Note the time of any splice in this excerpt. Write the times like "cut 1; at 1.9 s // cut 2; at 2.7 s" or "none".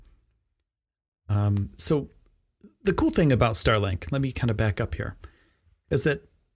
none